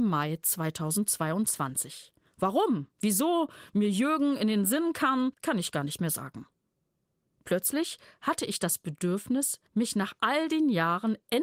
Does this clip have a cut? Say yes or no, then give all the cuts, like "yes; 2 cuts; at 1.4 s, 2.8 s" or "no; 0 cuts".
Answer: yes; 3 cuts; at 2.9 s, 5.3 s, 9.7 s